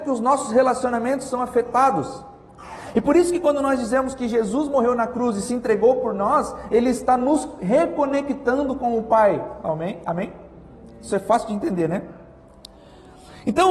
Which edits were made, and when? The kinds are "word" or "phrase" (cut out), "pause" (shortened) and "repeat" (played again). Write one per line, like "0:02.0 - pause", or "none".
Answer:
none